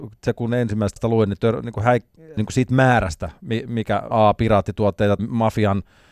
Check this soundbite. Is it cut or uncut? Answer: cut